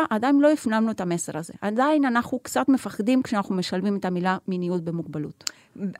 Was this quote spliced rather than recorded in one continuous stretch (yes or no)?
no